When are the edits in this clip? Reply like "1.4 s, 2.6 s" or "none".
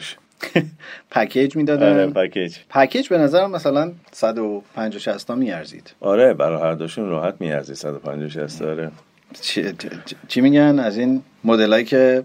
2.6 s, 4.1 s, 6.0 s